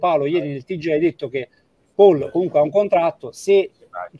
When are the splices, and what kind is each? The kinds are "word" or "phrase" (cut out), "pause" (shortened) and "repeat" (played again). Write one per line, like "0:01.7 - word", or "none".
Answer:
none